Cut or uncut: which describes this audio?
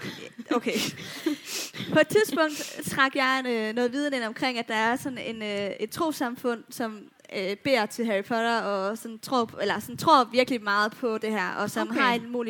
uncut